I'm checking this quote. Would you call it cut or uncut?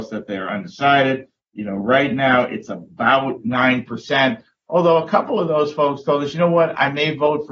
uncut